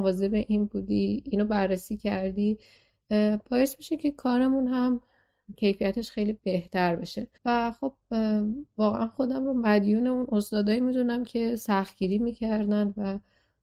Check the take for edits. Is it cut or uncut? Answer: cut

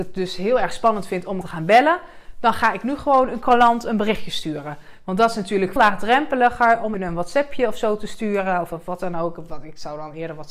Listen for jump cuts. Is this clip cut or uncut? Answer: cut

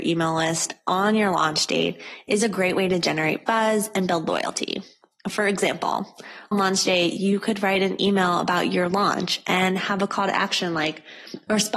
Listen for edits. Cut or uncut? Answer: cut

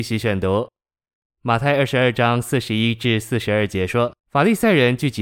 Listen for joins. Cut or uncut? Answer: cut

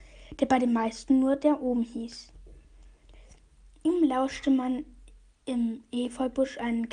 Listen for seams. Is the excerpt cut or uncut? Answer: uncut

